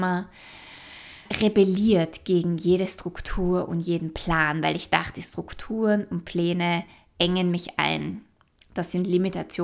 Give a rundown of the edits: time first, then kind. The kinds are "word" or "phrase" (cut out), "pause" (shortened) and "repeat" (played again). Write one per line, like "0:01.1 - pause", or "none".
none